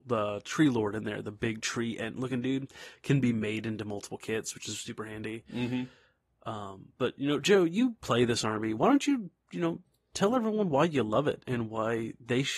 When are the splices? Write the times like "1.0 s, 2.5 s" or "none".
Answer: none